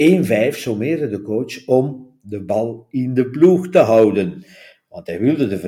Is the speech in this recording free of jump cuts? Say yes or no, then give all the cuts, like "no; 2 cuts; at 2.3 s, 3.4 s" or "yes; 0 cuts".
yes; 0 cuts